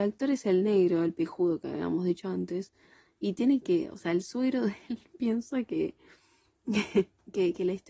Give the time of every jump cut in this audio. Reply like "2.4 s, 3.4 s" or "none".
none